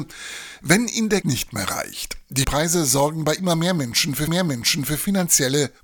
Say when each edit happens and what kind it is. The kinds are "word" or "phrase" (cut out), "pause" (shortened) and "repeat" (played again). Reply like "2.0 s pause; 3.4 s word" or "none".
1.2 s phrase; 2.4 s word; 4.3 s repeat